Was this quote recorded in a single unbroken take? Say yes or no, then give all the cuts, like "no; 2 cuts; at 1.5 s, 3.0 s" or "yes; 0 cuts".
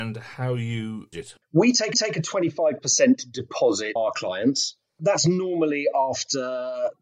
no; 3 cuts; at 1.1 s, 1.9 s, 4.0 s